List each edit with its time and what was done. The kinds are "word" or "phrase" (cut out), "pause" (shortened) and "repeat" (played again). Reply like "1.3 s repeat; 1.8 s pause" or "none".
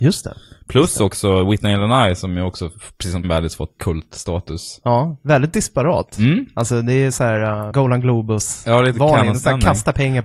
3.2 s word; 3.8 s word